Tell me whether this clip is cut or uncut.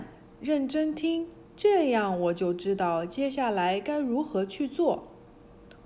cut